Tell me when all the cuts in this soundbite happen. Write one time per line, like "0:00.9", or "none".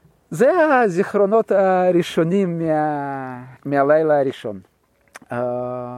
0:03.6